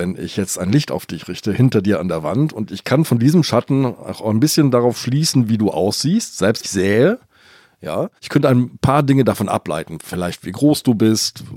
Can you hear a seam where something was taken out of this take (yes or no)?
yes